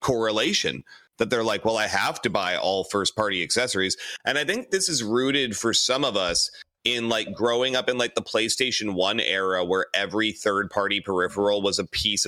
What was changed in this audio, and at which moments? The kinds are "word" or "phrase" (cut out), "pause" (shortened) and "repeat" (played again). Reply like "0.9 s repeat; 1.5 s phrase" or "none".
none